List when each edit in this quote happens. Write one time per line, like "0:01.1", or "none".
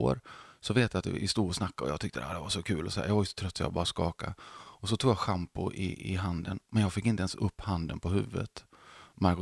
none